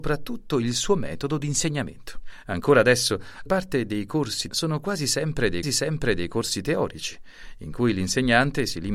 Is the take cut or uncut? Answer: cut